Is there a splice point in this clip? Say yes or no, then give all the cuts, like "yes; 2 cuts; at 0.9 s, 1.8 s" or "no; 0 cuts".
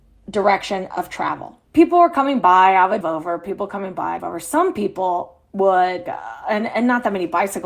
yes; 4 cuts; at 1.7 s, 3.0 s, 4.2 s, 6.1 s